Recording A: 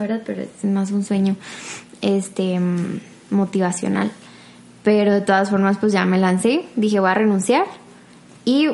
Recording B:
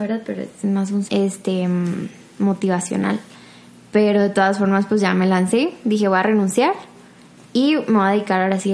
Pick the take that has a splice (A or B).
B